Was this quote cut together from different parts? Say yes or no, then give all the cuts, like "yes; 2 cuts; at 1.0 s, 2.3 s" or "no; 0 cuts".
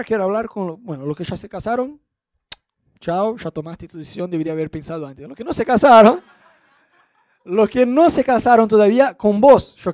no; 0 cuts